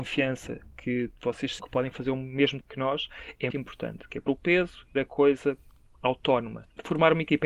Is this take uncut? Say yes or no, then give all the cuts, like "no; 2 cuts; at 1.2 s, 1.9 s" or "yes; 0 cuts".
no; 5 cuts; at 1.6 s, 2.6 s, 3.5 s, 4.3 s, 5.0 s